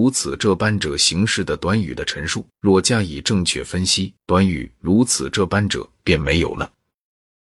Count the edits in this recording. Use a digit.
2